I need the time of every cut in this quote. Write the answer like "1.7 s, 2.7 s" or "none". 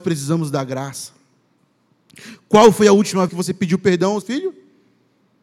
3.3 s, 4.2 s